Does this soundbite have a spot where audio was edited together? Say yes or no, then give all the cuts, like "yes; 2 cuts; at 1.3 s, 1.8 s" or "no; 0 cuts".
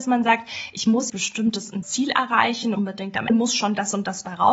yes; 4 cuts; at 1.1 s, 1.8 s, 2.7 s, 3.3 s